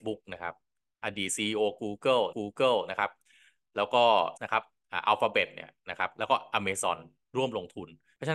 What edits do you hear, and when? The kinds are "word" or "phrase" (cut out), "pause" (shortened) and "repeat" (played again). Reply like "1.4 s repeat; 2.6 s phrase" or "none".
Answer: 2.3 s repeat; 4.4 s word